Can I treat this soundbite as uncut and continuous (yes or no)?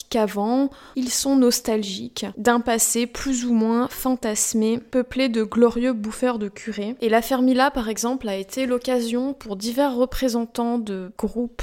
yes